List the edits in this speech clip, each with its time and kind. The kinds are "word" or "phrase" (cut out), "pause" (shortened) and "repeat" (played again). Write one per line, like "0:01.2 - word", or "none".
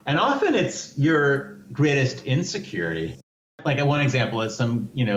none